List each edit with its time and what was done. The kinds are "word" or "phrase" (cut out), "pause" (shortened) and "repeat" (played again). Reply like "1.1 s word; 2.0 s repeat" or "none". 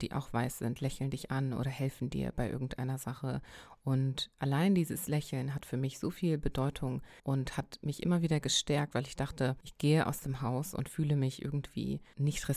7.2 s pause